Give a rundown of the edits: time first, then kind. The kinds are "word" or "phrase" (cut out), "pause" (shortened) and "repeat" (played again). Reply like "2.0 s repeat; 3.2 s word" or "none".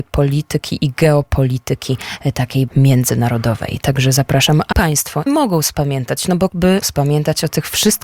2.7 s word; 4.7 s word; 5.3 s word; 6.5 s word; 6.8 s word